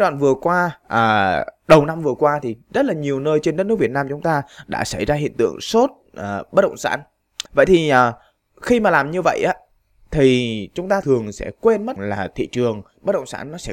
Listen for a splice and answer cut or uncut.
cut